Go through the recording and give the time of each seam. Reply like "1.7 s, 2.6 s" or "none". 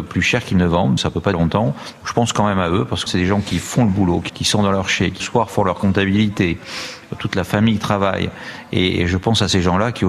1.0 s, 1.3 s, 3.1 s, 4.3 s, 5.2 s